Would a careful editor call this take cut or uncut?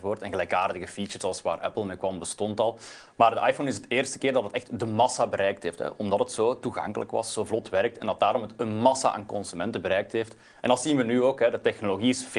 uncut